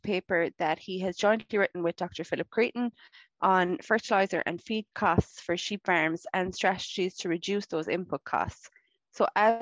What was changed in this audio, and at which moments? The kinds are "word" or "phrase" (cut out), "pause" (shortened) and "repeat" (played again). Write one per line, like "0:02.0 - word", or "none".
none